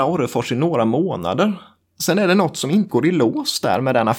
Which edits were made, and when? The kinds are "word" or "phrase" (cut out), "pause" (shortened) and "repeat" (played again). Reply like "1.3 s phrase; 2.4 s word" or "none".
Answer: 2.9 s word